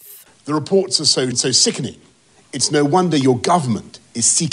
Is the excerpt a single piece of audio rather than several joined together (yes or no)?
no